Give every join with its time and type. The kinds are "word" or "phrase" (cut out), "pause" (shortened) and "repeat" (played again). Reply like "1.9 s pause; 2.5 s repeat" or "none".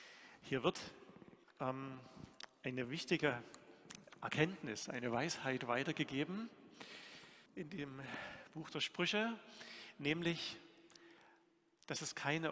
1.4 s pause; 7.5 s pause